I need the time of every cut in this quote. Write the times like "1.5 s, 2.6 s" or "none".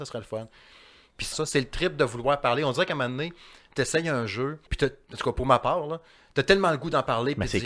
1.3 s, 4.7 s